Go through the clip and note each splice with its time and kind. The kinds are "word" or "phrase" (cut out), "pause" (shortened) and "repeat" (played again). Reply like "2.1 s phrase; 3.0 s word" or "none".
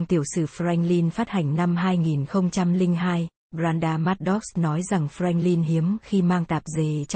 none